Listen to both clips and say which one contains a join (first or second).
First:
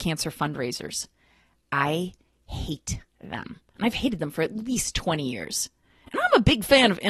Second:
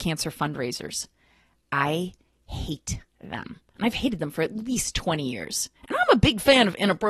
second